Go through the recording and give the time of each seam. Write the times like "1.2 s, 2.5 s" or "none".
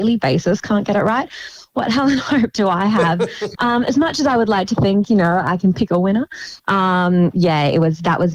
3.6 s